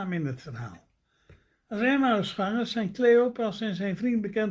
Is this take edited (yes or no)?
no